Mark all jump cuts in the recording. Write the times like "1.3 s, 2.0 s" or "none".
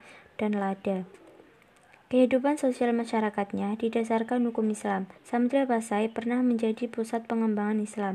5.2 s